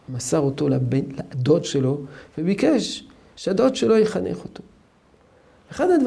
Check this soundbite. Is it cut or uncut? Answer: uncut